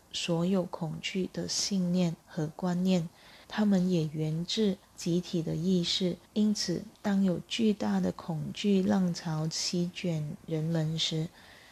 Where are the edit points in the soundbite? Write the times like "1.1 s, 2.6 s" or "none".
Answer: 2.2 s, 3.4 s, 4.8 s, 6.3 s, 6.9 s